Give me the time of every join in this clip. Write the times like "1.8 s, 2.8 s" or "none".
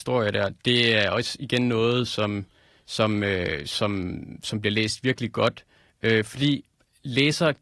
none